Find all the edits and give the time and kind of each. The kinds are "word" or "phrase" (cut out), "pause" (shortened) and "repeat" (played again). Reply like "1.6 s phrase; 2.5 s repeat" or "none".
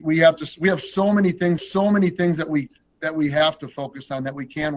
1.6 s repeat

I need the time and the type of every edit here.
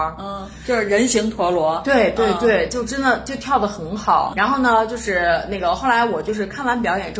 4.3 s word

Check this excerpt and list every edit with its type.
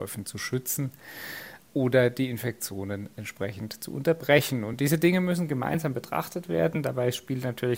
none

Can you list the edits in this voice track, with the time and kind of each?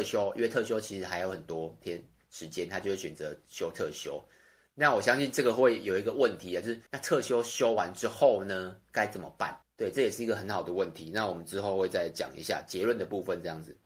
6.9 s pause; 9.6 s pause

